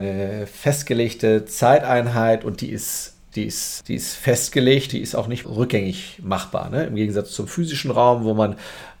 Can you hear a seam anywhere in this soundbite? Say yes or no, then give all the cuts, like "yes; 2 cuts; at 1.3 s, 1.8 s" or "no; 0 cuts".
yes; 3 cuts; at 3.3 s, 4.9 s, 5.4 s